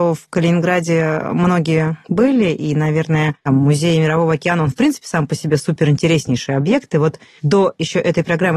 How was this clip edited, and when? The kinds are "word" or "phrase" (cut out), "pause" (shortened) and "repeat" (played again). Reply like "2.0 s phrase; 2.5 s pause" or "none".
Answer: 3.4 s pause